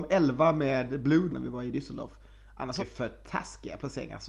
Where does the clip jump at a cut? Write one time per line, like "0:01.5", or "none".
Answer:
0:01.3
0:02.8